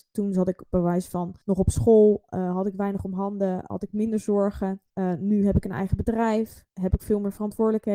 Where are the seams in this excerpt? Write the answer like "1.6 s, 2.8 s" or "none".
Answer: 1.4 s, 4.9 s, 6.7 s